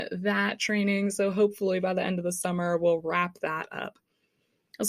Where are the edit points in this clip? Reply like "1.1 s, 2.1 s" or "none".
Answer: none